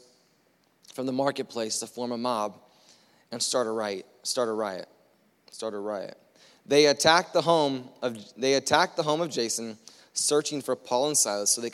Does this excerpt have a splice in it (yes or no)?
no